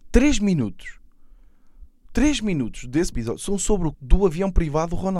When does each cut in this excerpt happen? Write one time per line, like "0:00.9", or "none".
0:03.1
0:03.9